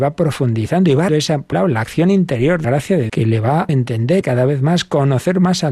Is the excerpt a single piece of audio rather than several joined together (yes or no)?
no